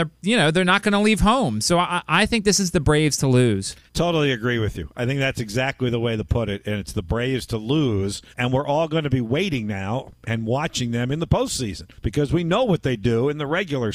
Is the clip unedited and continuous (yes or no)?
no